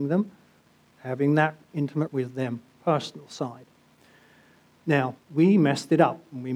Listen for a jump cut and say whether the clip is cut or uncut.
cut